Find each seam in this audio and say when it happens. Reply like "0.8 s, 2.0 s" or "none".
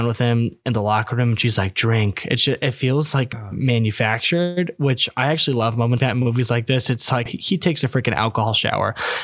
3.3 s, 6.0 s, 7.3 s